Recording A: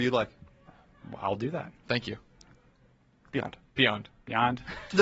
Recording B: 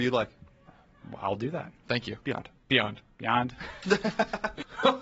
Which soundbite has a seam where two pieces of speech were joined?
B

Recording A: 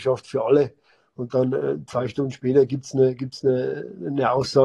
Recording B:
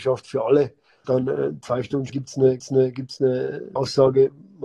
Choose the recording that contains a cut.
B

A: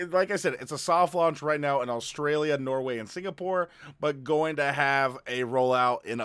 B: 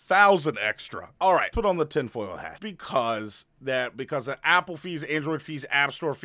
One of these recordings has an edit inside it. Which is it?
B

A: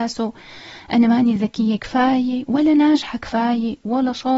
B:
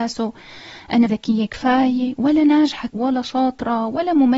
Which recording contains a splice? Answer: B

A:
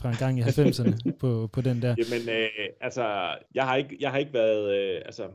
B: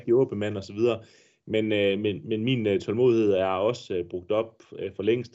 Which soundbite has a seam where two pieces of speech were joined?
A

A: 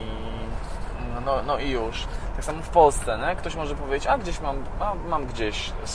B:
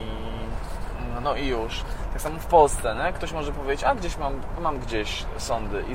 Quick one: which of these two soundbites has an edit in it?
B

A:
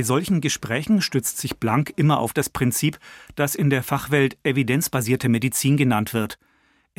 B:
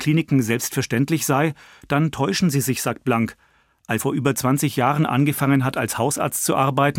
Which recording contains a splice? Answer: B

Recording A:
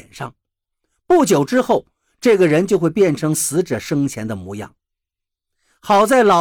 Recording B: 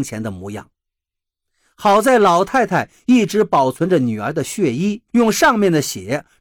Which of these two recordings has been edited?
B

